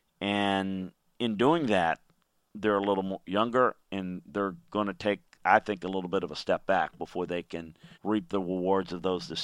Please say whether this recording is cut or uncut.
cut